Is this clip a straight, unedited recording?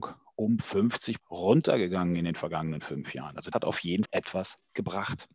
no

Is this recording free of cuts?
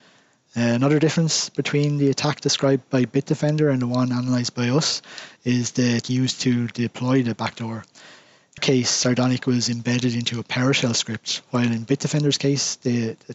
no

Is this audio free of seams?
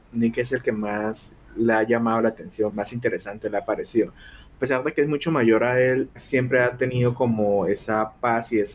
no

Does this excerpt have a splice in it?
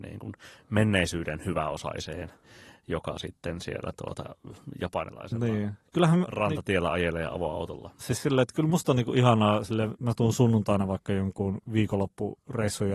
no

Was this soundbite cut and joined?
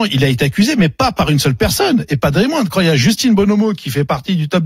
no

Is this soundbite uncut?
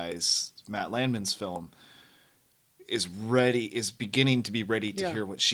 yes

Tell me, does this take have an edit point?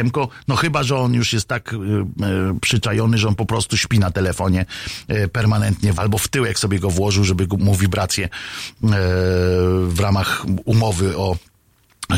yes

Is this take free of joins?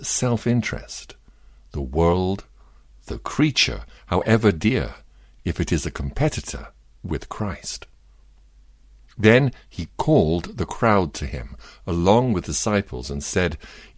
no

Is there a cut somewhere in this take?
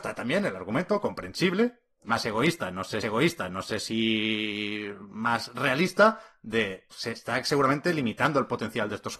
yes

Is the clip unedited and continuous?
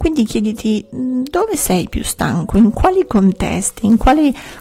yes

